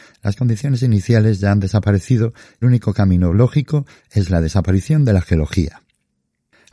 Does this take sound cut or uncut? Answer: cut